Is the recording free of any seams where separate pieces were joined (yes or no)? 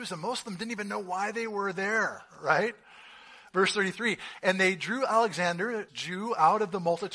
no